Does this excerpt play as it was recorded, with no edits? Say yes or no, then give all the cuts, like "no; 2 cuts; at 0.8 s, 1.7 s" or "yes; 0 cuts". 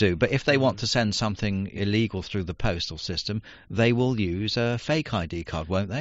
no; 1 cut; at 1.8 s